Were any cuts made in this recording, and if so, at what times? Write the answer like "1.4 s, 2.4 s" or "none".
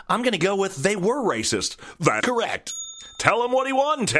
2.2 s